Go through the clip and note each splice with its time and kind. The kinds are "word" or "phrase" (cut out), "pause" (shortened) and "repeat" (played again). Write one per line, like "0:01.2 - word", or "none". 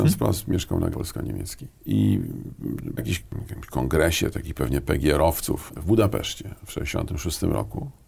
0:00.9 - word
0:03.0 - phrase
0:05.7 - word